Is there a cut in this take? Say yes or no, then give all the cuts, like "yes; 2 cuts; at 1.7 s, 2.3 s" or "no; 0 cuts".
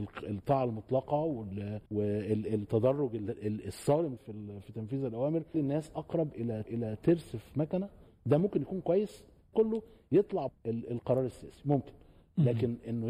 yes; 6 cuts; at 1.9 s, 4.2 s, 5.5 s, 6.7 s, 9.5 s, 10.5 s